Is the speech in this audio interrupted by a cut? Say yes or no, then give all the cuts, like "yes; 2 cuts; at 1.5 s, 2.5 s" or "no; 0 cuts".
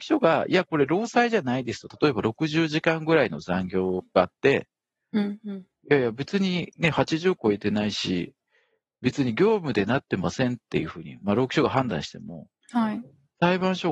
no; 0 cuts